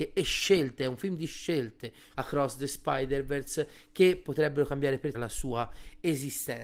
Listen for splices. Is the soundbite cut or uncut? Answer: cut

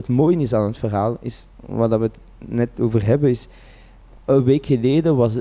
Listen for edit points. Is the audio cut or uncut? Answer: cut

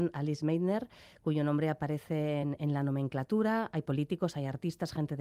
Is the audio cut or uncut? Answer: uncut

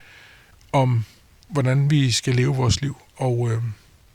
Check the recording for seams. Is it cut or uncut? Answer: uncut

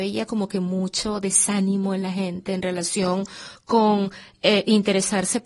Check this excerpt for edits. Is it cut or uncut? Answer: uncut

